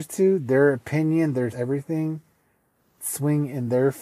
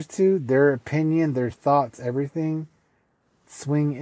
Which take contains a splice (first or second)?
first